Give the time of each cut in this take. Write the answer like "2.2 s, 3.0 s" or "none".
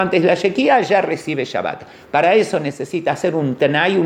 none